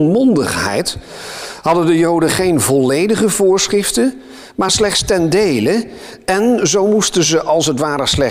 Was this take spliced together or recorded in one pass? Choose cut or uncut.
uncut